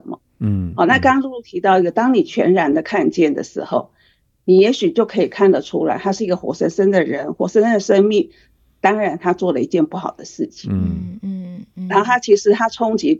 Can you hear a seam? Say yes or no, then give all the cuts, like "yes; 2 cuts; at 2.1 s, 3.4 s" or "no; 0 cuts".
no; 0 cuts